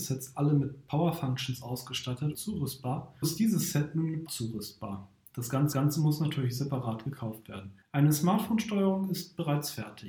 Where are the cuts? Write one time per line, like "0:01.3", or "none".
0:02.3
0:03.2
0:04.3
0:05.7
0:07.8